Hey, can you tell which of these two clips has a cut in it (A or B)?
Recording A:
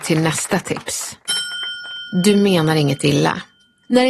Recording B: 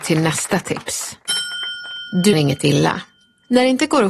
B